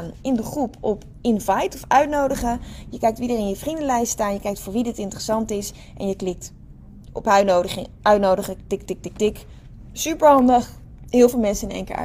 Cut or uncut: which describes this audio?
uncut